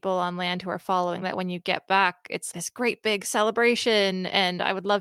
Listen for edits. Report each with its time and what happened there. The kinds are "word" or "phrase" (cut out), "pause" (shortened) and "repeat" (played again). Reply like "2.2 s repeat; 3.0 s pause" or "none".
1.2 s word; 2.5 s word

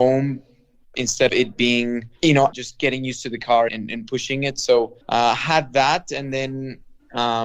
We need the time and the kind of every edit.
1.3 s word; 2.2 s pause; 2.5 s phrase; 3.7 s word; 5.0 s pause

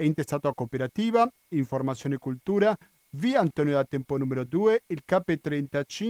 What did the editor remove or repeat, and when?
none

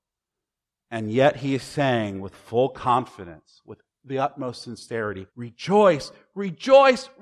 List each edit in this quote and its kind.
5.3 s pause

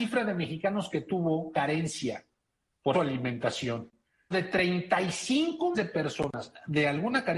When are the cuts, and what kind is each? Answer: 1.5 s word; 2.9 s word; 4.3 s word; 5.7 s word

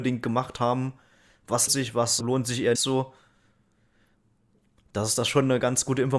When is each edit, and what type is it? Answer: 1.7 s word; 2.2 s word; 2.7 s word

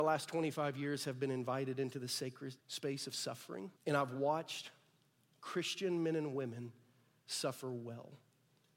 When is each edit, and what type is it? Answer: 2.6 s pause; 3.8 s pause

